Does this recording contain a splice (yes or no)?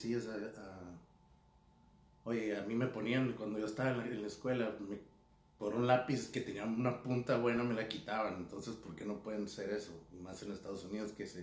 no